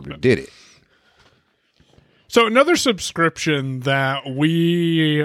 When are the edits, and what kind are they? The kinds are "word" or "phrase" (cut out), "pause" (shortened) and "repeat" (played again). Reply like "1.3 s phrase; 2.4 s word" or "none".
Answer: none